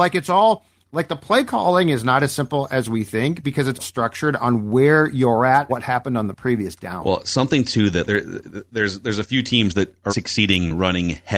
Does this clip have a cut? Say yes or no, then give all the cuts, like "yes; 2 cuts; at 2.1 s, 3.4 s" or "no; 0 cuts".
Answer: yes; 4 cuts; at 3.8 s, 5.7 s, 8.0 s, 10.1 s